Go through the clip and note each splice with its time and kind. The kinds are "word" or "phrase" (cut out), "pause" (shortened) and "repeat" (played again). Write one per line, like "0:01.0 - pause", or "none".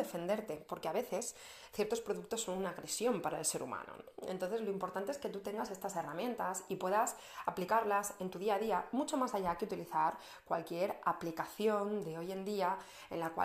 none